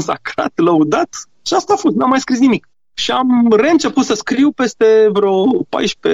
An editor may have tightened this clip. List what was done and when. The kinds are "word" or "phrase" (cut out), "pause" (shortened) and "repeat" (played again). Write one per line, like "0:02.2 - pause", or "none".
none